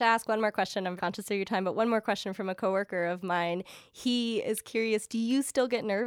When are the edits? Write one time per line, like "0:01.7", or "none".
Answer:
0:01.0

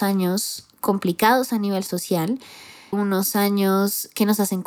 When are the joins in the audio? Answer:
0:02.9

